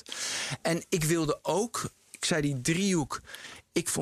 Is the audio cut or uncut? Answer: cut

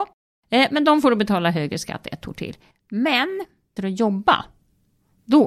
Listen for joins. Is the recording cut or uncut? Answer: cut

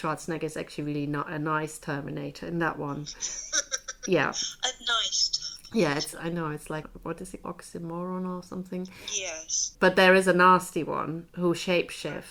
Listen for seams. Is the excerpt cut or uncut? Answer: cut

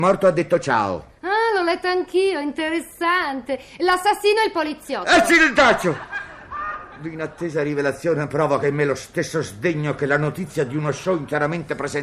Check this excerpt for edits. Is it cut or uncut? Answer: uncut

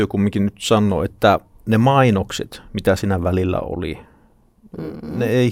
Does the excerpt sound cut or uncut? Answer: uncut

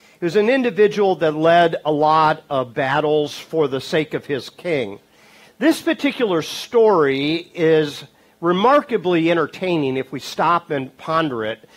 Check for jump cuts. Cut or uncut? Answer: uncut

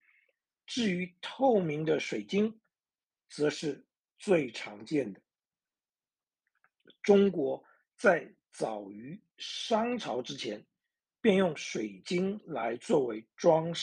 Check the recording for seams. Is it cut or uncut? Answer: uncut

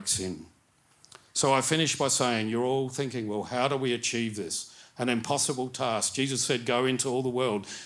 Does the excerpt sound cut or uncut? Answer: uncut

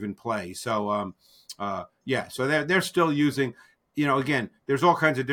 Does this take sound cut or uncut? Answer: uncut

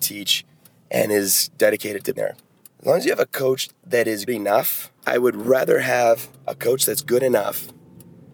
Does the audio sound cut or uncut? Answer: cut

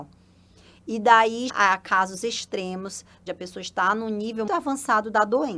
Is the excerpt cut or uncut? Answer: cut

